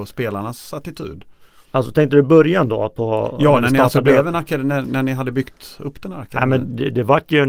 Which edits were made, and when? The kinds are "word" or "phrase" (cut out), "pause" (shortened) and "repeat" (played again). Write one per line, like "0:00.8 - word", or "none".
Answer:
none